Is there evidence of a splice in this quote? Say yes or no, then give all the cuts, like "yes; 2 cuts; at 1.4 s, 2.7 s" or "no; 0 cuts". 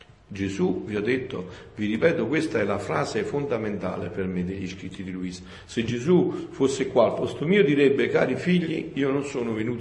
no; 0 cuts